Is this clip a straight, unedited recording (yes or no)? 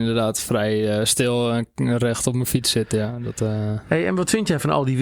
yes